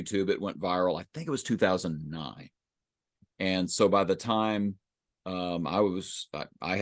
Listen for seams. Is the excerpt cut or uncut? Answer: uncut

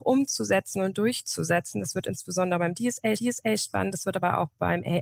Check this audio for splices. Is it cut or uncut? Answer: cut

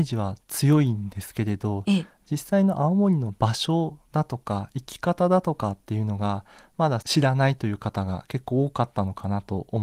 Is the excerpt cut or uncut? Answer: uncut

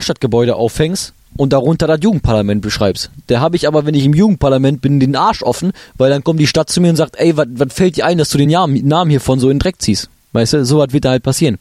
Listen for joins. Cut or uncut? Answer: uncut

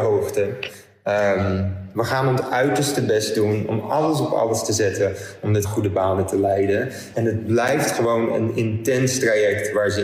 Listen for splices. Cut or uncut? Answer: cut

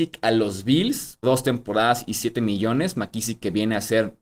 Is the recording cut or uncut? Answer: cut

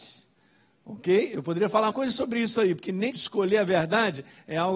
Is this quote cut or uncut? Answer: cut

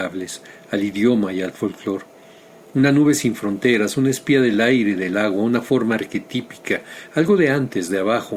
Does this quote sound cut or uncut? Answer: uncut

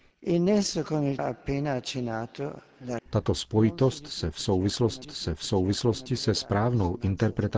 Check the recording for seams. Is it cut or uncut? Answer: cut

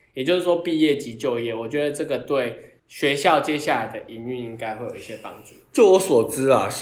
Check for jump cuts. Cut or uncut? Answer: cut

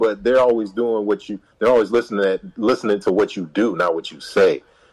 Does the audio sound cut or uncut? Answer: uncut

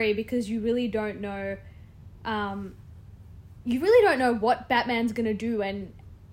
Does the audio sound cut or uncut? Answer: uncut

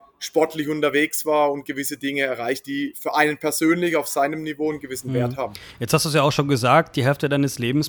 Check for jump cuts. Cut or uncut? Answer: cut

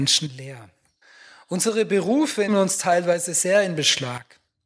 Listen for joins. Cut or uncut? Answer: cut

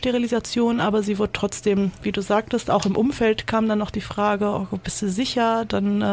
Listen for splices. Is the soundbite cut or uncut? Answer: uncut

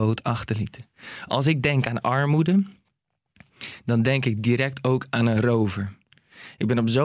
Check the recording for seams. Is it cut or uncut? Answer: uncut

